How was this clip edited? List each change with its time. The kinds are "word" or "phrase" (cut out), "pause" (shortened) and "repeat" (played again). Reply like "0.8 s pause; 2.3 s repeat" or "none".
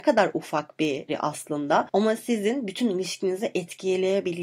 1.1 s word